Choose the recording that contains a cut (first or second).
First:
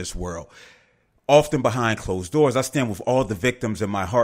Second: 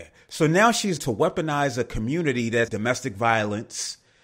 second